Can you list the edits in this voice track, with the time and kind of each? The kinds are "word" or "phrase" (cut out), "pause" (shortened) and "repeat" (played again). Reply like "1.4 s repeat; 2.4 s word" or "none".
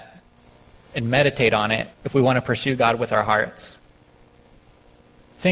1.9 s pause